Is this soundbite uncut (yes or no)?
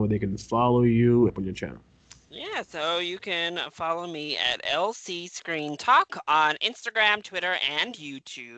no